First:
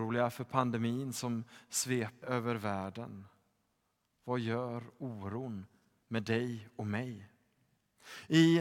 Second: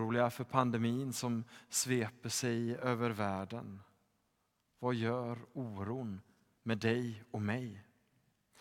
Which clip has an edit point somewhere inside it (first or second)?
first